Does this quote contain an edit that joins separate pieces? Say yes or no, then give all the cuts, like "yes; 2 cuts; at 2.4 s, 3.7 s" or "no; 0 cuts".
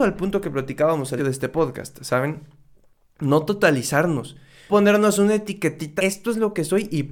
yes; 3 cuts; at 1.2 s, 4.7 s, 6.0 s